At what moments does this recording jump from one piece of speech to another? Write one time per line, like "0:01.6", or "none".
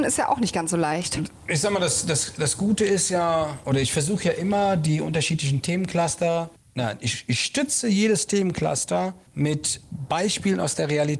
0:06.6
0:09.3